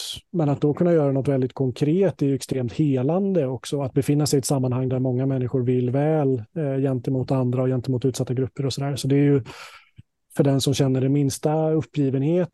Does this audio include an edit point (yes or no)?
no